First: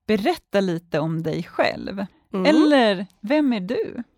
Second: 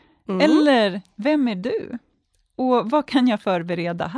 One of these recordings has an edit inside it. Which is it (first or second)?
first